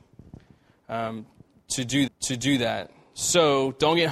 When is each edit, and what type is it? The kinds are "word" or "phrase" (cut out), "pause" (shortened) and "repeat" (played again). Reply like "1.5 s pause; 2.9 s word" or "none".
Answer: 2.1 s repeat